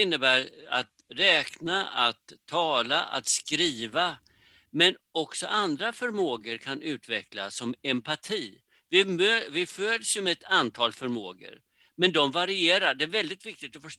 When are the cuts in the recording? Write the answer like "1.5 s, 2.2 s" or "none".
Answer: none